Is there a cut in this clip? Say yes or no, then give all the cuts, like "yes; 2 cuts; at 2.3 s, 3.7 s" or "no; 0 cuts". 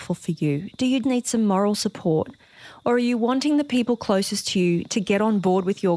yes; 1 cut; at 1.0 s